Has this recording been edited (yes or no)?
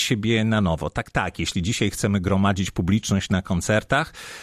no